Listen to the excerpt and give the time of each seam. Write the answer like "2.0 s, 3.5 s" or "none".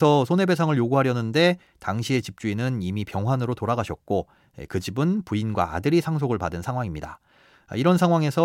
none